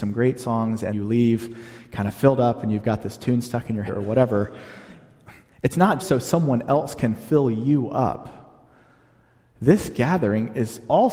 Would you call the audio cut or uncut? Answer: cut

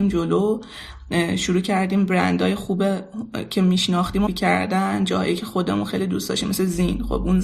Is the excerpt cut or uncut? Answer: cut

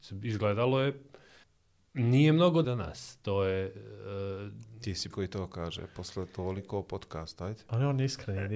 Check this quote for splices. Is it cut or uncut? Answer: cut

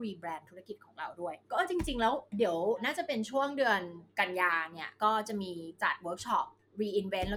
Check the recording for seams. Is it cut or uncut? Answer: uncut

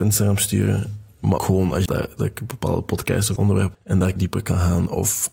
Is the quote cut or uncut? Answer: cut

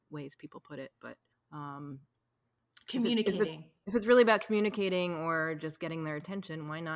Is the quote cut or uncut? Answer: cut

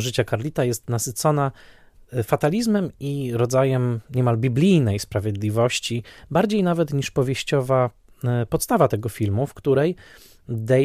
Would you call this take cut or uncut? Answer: uncut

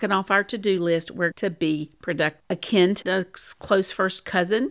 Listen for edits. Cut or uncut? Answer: cut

